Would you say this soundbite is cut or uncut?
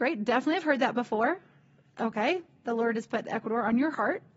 uncut